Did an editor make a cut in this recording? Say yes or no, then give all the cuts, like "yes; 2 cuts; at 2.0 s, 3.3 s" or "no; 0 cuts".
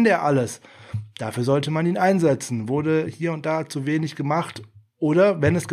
no; 0 cuts